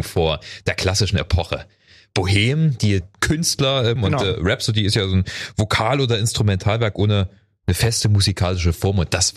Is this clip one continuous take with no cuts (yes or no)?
no